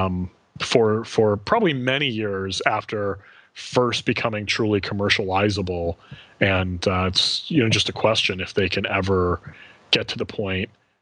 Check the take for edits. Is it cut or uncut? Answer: uncut